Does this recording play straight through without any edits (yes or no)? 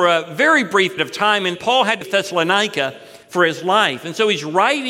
no